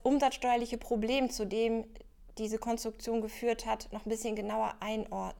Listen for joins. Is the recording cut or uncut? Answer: uncut